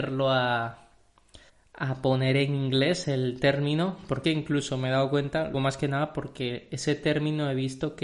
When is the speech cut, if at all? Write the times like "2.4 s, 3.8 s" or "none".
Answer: 1.5 s, 4.2 s, 5.5 s

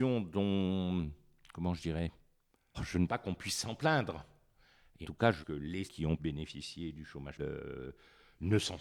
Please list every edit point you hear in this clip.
2.7 s, 3.1 s, 5.0 s, 5.4 s, 5.9 s, 6.2 s, 7.4 s

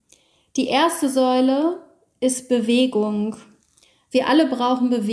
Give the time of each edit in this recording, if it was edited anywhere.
none

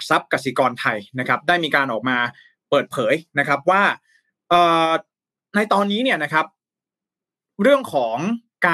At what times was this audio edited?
none

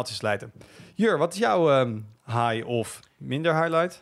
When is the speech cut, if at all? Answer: none

